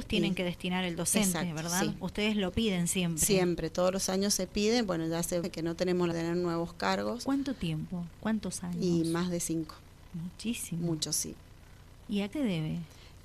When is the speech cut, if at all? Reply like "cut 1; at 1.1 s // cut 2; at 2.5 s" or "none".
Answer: cut 1; at 5.4 s // cut 2; at 6.1 s // cut 3; at 12.3 s